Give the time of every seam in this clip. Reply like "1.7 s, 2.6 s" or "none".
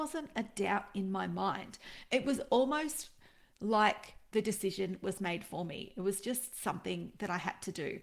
none